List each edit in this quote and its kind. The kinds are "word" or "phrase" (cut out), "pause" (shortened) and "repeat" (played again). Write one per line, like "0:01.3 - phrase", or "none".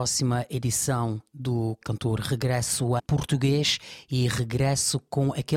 0:01.8 - word
0:03.0 - word